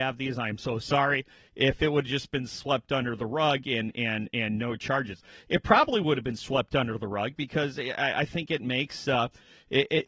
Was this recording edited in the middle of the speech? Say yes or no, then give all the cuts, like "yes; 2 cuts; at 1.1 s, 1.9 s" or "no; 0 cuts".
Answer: no; 0 cuts